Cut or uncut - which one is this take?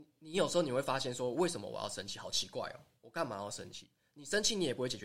uncut